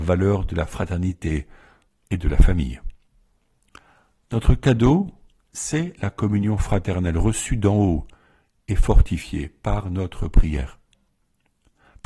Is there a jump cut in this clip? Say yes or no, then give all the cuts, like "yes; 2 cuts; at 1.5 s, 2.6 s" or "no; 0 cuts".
no; 0 cuts